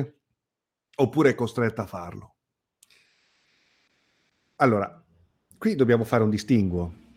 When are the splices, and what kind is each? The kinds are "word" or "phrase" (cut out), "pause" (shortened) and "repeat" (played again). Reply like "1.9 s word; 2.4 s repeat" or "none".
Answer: none